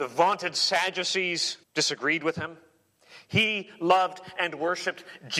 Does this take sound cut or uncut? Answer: cut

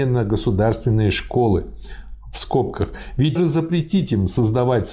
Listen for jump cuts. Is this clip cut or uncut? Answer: cut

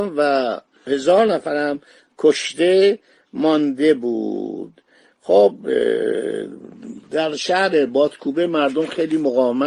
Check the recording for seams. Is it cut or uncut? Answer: uncut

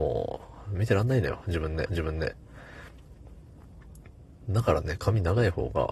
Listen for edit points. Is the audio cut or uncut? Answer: cut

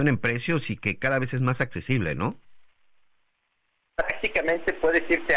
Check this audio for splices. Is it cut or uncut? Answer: uncut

